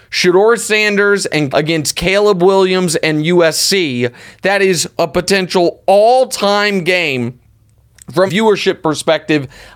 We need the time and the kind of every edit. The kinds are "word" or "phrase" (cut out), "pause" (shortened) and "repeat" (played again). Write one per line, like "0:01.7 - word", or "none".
0:01.5 - word
0:08.3 - word